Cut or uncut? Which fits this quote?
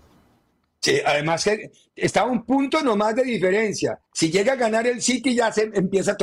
cut